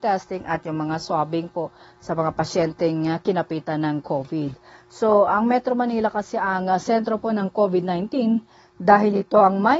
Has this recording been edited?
no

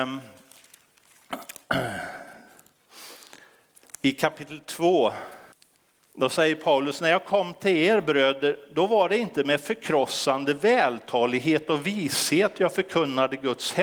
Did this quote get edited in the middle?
yes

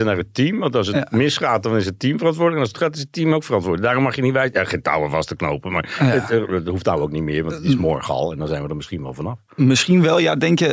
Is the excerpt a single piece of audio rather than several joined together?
no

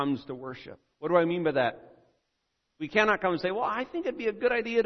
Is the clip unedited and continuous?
yes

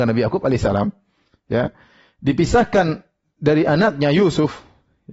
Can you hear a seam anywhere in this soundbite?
no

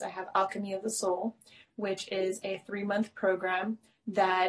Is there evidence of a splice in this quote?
no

